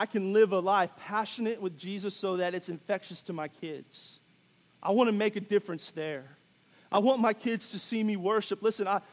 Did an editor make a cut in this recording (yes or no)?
no